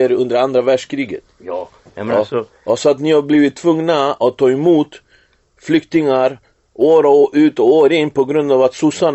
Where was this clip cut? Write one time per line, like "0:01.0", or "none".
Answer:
none

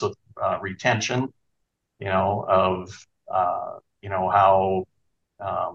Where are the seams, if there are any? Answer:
none

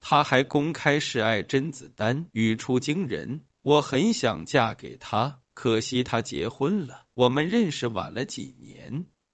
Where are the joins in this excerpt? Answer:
0:02.3
0:07.1

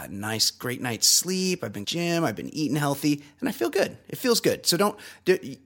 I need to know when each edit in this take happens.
0:01.8

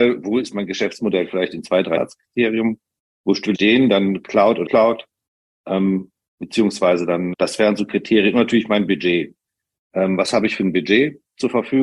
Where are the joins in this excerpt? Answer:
0:02.0
0:03.5
0:04.7
0:07.3

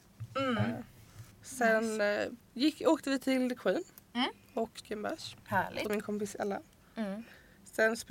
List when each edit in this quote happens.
0:01.3
0:02.4
0:04.8
0:05.9

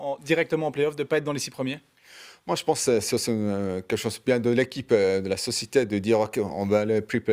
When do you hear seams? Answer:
none

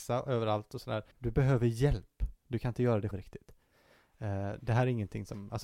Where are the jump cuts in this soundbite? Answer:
0:01.1
0:02.4
0:03.1

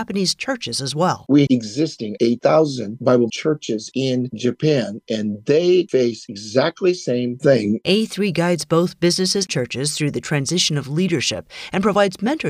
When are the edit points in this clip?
0:01.5
0:02.2
0:03.3
0:09.5

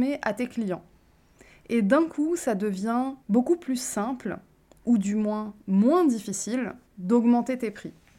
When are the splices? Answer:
0:03.2
0:06.9

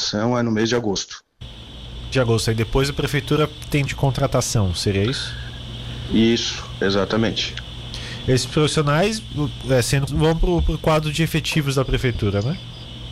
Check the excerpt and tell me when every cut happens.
0:02.1
0:03.9
0:10.1

